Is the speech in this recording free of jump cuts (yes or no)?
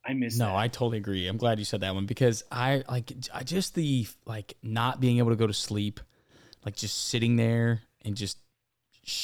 yes